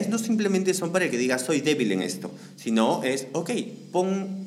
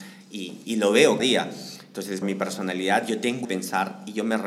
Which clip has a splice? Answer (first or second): second